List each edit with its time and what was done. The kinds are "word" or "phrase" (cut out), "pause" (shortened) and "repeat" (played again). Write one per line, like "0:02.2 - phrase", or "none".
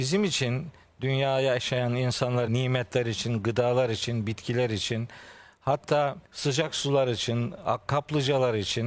0:02.5 - word
0:06.2 - pause